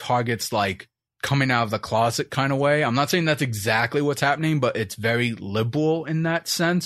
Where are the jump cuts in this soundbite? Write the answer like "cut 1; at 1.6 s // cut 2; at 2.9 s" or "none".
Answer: none